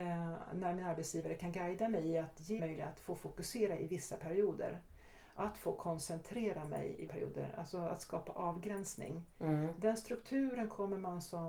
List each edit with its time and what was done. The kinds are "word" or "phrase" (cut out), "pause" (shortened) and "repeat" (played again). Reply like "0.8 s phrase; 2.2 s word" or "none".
2.6 s word; 7.1 s word